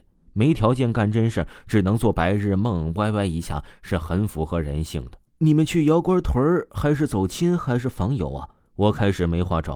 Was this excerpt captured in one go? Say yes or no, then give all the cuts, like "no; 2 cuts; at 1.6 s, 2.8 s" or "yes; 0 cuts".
no; 1 cut; at 5.3 s